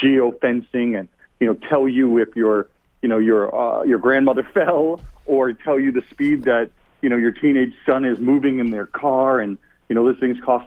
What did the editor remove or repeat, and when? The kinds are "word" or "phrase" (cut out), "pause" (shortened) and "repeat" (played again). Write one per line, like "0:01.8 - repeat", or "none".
none

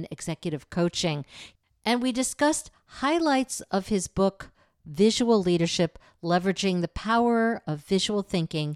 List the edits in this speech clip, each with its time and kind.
none

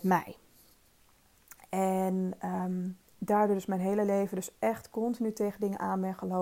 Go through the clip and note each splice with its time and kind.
0:03.1 - pause

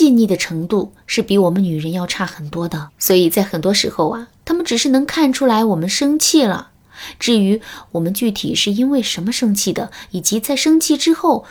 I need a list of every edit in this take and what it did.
0:02.9 - pause

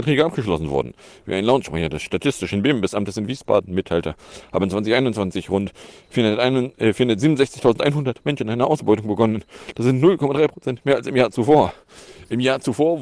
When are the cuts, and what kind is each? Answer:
none

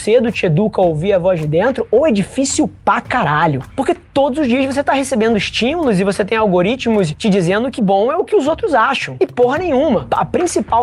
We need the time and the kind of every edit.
0:07.8 - word

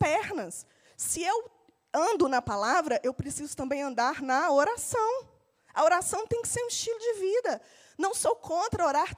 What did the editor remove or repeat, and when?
none

